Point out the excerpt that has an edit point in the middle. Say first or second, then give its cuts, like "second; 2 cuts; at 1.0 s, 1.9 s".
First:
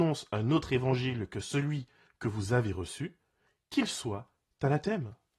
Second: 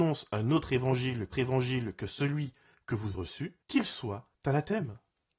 second; 4 cuts; at 1.3 s, 3.1 s, 3.6 s, 4.3 s